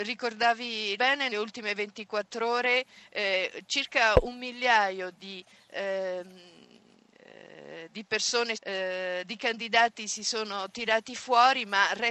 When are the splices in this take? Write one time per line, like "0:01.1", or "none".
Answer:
0:01.0
0:01.3
0:08.5